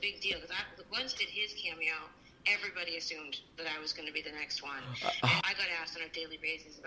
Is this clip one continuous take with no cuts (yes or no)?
no